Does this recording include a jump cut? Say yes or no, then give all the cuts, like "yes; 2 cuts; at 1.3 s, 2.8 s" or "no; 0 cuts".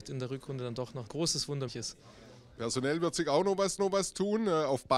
yes; 3 cuts; at 1.1 s, 1.7 s, 3.8 s